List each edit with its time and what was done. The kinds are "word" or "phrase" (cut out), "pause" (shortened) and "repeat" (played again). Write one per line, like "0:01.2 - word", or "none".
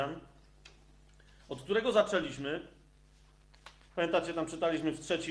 none